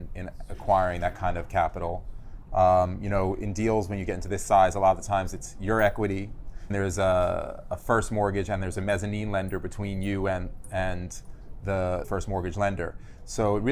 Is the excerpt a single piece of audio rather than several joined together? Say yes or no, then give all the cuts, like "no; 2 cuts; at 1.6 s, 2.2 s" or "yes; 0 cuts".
no; 2 cuts; at 6.7 s, 12.0 s